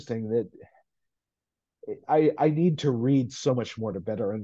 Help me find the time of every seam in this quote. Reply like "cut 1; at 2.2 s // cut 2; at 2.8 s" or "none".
cut 1; at 2.0 s